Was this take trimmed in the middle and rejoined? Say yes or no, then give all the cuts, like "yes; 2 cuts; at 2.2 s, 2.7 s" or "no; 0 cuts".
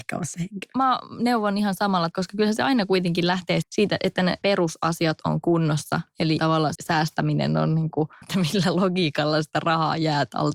yes; 6 cuts; at 2.1 s, 3.6 s, 4.4 s, 6.4 s, 6.7 s, 8.2 s